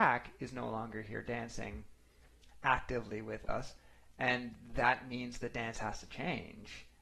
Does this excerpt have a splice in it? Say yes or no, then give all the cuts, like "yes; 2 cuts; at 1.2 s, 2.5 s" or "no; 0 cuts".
no; 0 cuts